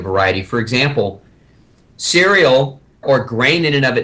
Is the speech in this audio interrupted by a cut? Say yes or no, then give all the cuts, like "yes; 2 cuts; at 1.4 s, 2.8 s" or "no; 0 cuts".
yes; 1 cut; at 3.0 s